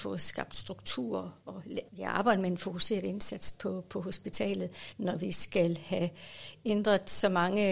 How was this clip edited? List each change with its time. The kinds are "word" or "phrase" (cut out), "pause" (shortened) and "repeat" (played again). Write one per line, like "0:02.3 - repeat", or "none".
0:01.9 - pause